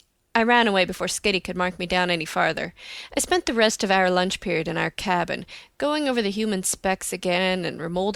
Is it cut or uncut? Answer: uncut